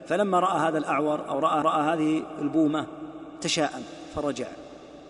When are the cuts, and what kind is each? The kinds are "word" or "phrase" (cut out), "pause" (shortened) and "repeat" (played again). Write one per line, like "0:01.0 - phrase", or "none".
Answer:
0:01.6 - repeat